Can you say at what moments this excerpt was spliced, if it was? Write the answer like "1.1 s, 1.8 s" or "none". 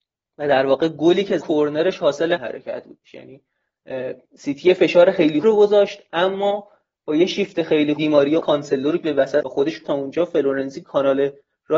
1.4 s, 2.4 s, 5.4 s, 8.0 s, 8.4 s, 9.0 s, 9.4 s, 9.8 s